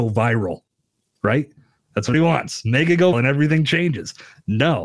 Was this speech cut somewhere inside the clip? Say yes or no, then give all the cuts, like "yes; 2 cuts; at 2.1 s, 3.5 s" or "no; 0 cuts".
yes; 2 cuts; at 2.1 s, 3.1 s